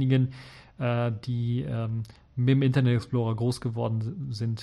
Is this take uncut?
yes; 0 cuts

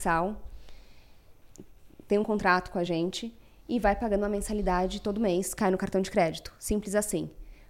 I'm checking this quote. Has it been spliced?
no; 0 cuts

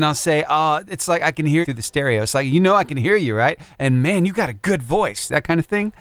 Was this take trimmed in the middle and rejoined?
yes; 1 cut; at 1.6 s

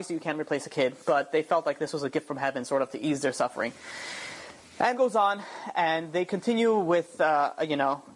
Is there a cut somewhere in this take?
yes; 1 cut; at 4.9 s

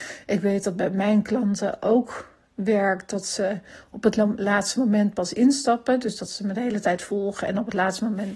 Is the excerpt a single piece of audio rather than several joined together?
yes; 0 cuts

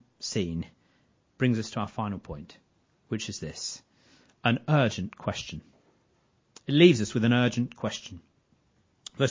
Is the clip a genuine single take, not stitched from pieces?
yes; 0 cuts

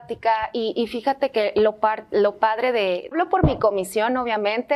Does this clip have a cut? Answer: yes; 1 cut; at 3.1 s

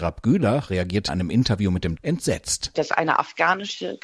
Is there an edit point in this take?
yes; 2 cuts; at 1.1 s, 2.0 s

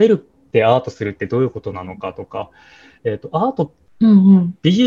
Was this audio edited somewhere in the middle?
no; 0 cuts

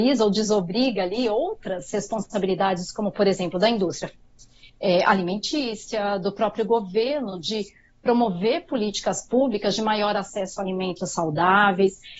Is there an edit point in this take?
no; 0 cuts

